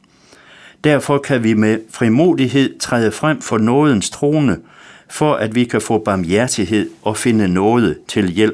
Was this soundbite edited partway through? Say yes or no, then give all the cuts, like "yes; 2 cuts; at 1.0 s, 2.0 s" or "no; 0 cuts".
no; 0 cuts